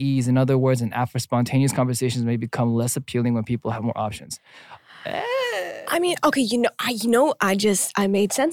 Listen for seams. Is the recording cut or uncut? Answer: uncut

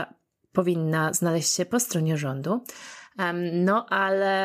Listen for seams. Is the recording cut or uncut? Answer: uncut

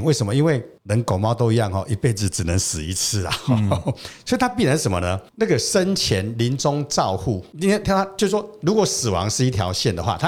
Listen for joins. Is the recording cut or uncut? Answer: uncut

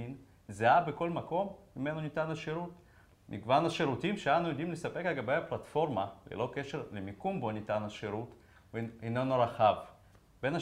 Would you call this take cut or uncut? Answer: uncut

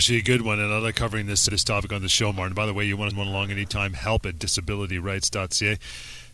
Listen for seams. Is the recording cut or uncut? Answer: cut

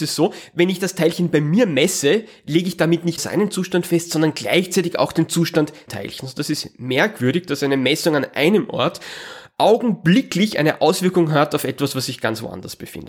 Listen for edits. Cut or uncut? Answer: cut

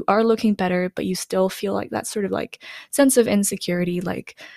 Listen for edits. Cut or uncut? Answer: uncut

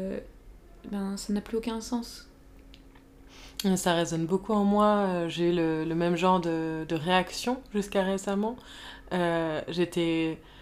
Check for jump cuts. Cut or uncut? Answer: uncut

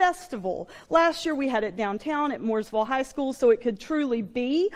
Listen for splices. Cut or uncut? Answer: uncut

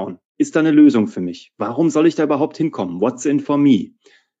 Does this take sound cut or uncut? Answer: uncut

